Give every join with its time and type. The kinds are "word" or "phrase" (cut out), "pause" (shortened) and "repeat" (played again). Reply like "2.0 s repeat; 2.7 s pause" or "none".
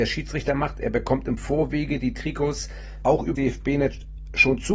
3.0 s word; 3.3 s word